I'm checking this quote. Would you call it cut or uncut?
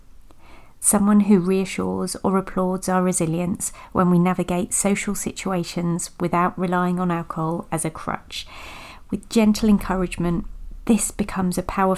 uncut